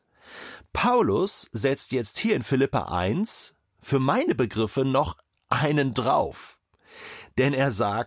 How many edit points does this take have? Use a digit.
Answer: 0